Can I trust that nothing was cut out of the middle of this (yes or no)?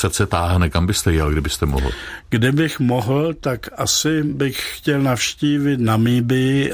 yes